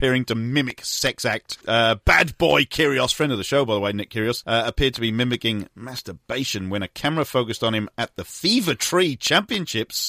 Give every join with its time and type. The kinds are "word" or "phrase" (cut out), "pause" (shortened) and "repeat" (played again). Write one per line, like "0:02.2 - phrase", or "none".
none